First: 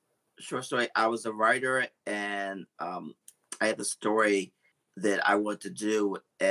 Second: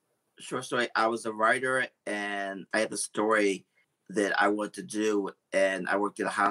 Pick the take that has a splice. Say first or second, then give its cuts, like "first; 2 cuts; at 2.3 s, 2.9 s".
second; 1 cut; at 2.7 s